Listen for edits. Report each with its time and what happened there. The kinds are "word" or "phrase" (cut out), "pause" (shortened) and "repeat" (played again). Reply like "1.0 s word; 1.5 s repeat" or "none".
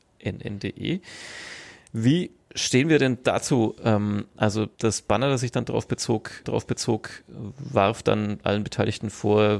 4.7 s pause; 6.4 s repeat